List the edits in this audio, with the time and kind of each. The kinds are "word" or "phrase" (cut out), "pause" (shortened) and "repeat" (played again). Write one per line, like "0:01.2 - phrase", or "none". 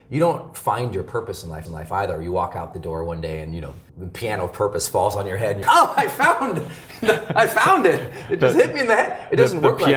0:01.6 - repeat
0:03.9 - pause
0:05.6 - word